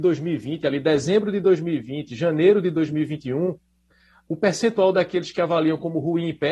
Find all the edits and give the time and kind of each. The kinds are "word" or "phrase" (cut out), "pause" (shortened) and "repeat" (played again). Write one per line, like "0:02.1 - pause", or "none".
none